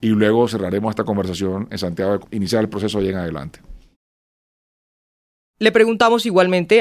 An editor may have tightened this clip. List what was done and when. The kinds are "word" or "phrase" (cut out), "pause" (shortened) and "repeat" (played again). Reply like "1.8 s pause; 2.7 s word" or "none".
2.2 s phrase